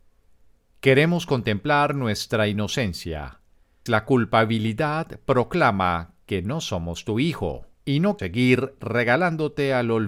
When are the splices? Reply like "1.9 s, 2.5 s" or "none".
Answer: 3.9 s, 7.7 s, 8.2 s